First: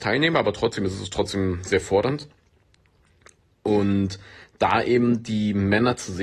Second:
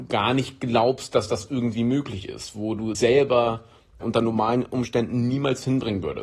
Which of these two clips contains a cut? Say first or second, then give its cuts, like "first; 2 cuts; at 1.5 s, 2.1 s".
second; 2 cuts; at 2.9 s, 4.0 s